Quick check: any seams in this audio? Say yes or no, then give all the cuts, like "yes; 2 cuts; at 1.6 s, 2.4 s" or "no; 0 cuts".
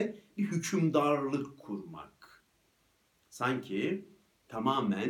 no; 0 cuts